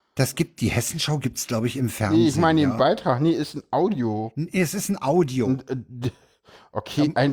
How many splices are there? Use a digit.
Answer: 0